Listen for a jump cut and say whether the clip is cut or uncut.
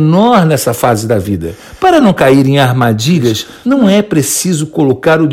uncut